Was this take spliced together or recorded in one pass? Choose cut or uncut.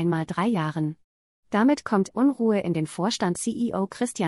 cut